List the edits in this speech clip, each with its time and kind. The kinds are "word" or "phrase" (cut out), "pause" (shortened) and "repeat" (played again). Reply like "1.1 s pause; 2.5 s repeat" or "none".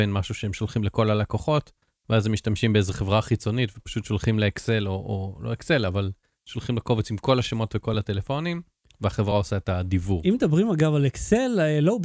none